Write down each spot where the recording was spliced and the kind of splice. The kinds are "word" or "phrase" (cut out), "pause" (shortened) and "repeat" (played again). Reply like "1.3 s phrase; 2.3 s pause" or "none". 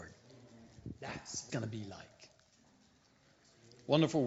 1.5 s word